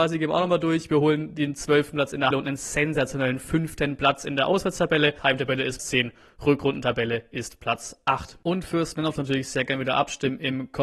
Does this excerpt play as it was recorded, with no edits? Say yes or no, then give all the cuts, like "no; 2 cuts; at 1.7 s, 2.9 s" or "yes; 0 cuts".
no; 3 cuts; at 2.3 s, 5.8 s, 9.2 s